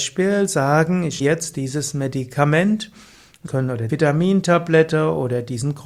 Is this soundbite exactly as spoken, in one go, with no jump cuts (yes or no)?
no